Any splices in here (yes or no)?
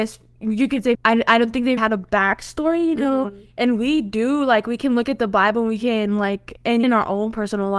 yes